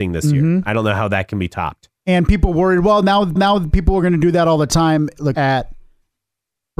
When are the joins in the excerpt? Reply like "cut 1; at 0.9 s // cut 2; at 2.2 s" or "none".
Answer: cut 1; at 2.0 s // cut 2; at 3.4 s // cut 3; at 5.3 s